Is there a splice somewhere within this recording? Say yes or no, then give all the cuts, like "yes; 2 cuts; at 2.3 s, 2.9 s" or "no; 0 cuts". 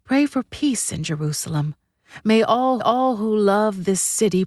yes; 1 cut; at 2.8 s